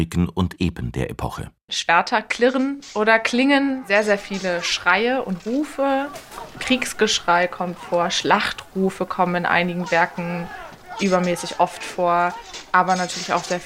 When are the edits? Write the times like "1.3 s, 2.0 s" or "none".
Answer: 1.6 s